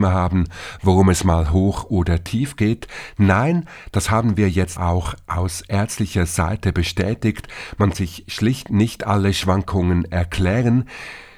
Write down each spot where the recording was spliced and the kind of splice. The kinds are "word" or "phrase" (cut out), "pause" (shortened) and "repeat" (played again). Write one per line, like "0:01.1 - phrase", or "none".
0:04.8 - word
0:07.9 - word